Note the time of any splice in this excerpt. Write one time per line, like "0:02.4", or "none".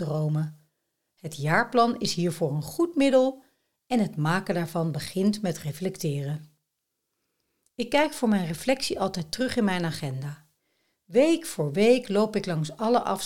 none